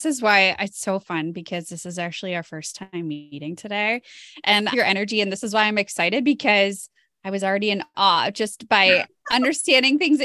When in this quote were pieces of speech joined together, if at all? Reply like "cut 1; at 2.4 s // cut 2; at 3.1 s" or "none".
cut 1; at 4.7 s